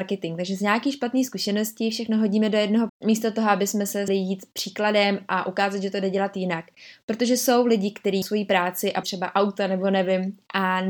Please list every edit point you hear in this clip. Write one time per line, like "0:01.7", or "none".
0:02.9
0:04.1
0:08.2
0:09.0